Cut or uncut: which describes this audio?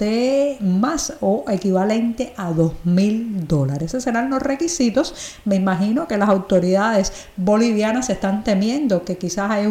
uncut